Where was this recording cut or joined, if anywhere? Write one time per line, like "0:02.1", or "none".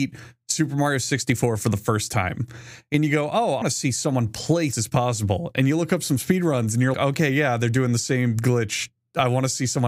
0:03.6
0:04.7
0:06.9